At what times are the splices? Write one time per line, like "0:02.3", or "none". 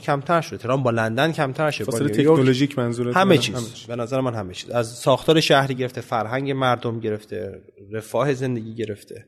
none